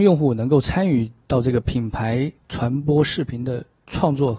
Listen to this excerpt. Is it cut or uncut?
cut